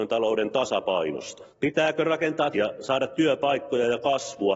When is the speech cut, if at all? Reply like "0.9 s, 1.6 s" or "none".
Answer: 1.5 s, 2.5 s